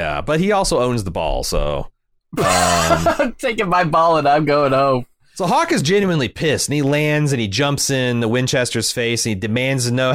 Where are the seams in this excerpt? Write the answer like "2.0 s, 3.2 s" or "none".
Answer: none